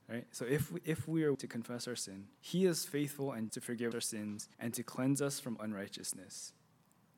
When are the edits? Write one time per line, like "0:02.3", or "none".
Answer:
0:01.3
0:02.4
0:03.5
0:03.9
0:04.5
0:05.6